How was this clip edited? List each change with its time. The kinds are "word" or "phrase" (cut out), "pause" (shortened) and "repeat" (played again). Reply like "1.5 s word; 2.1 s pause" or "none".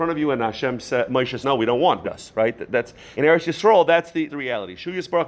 1.4 s word; 2.0 s phrase; 3.1 s word; 4.3 s word